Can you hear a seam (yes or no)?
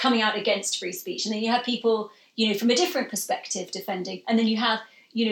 no